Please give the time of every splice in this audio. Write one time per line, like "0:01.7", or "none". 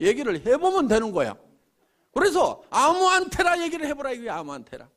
none